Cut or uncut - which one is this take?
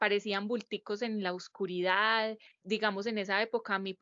cut